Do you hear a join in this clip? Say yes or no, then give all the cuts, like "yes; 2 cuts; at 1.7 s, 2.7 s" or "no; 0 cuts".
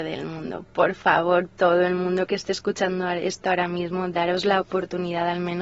no; 0 cuts